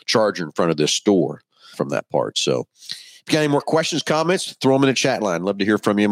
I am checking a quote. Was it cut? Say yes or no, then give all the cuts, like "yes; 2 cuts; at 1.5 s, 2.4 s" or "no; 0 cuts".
yes; 1 cut; at 1.7 s